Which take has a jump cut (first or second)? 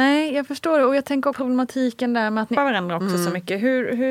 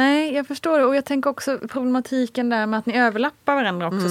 first